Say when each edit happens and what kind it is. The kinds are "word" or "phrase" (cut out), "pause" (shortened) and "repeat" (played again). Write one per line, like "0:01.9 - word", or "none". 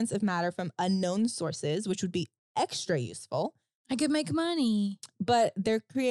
none

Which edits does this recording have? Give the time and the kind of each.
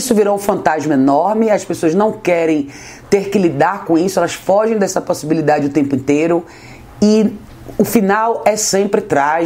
none

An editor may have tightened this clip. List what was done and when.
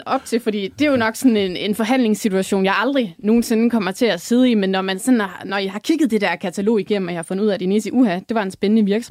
none

